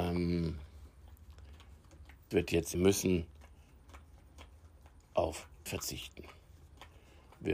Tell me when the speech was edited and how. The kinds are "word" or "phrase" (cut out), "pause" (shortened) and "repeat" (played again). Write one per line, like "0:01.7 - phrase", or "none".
0:02.3 - word
0:02.7 - phrase
0:05.7 - word